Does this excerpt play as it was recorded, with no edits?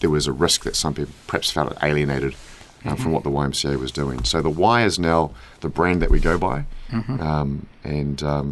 yes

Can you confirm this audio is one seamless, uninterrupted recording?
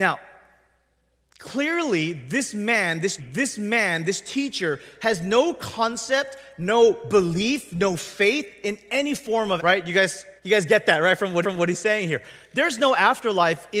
no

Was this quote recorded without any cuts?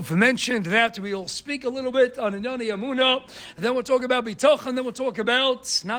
yes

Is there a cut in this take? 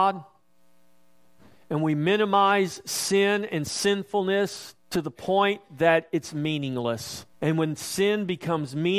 yes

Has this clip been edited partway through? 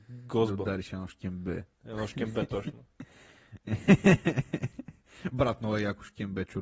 yes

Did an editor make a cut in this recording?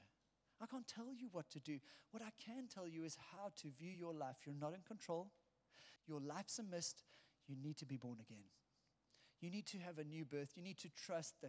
no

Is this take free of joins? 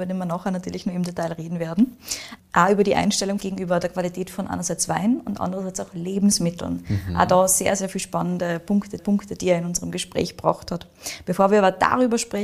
no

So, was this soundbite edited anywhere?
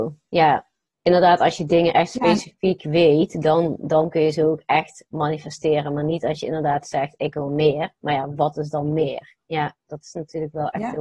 no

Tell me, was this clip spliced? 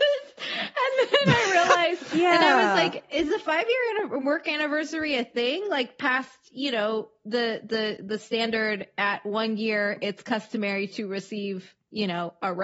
no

